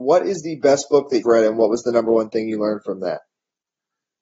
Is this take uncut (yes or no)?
no